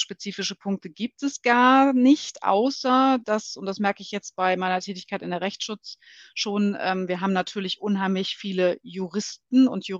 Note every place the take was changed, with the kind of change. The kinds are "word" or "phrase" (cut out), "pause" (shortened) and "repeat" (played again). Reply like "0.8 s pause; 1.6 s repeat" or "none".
none